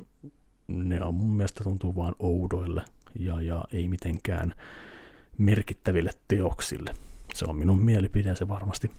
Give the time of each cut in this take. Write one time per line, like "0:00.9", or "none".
none